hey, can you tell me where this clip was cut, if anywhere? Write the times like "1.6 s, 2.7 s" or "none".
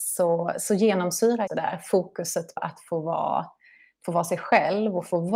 1.5 s, 2.6 s